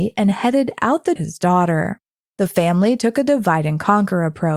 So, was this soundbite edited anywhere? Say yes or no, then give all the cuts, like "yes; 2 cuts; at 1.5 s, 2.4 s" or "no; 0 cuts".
yes; 1 cut; at 1.2 s